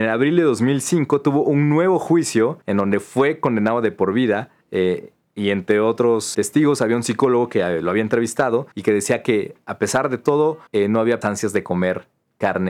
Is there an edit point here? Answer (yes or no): yes